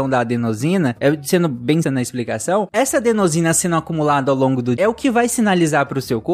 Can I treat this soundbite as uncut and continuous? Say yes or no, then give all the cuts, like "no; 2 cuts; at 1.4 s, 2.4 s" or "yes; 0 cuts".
no; 2 cuts; at 1.8 s, 4.8 s